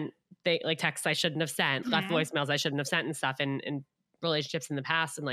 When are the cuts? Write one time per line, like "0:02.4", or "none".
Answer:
0:01.8